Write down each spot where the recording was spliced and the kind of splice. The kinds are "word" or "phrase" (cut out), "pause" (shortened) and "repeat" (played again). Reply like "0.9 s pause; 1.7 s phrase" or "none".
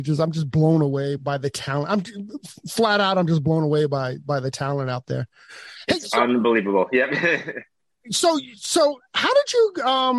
1.2 s word